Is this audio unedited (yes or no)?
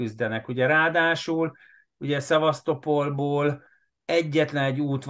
yes